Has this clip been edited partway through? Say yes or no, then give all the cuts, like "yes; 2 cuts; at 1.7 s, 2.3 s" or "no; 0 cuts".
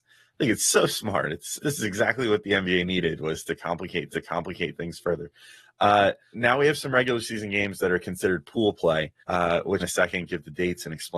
yes; 5 cuts; at 1.6 s, 4.1 s, 6.3 s, 9.2 s, 9.8 s